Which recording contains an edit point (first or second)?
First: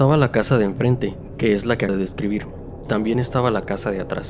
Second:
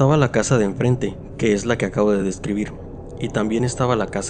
first